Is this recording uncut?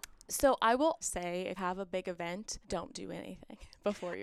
no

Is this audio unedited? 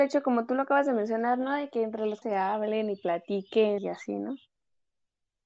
no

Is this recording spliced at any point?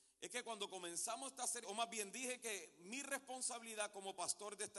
yes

